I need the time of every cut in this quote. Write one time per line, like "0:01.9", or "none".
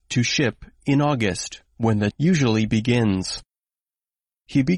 0:02.1